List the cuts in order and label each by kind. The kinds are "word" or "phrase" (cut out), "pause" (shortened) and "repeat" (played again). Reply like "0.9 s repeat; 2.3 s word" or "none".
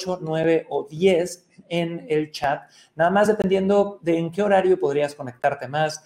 none